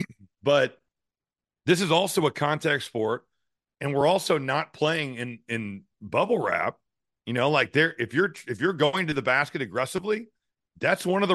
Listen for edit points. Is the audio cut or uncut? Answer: uncut